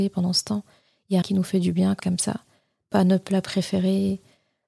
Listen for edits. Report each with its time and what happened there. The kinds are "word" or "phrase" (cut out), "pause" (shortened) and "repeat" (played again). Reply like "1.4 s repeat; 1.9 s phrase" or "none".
1.2 s word; 2.0 s word